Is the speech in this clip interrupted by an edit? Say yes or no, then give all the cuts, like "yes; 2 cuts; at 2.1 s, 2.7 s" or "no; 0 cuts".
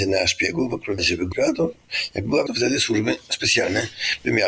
yes; 3 cuts; at 1.0 s, 1.3 s, 2.5 s